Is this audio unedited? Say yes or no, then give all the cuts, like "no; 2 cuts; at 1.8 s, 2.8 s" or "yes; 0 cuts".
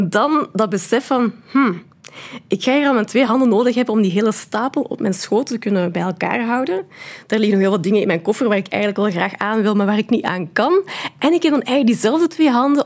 yes; 0 cuts